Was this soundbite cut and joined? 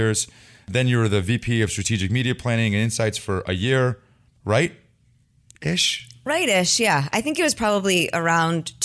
no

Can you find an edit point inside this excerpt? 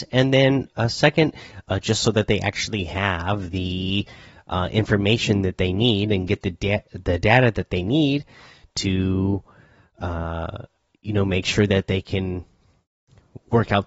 no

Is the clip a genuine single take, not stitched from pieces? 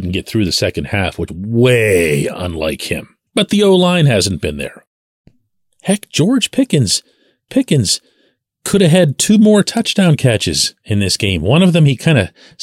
no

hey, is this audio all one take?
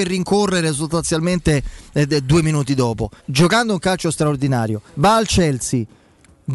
no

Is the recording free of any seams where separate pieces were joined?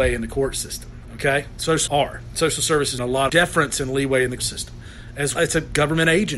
no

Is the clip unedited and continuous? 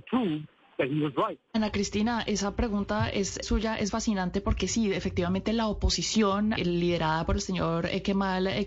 no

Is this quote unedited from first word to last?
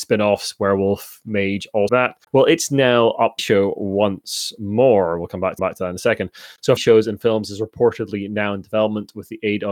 no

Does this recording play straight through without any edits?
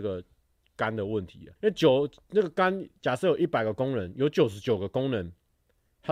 no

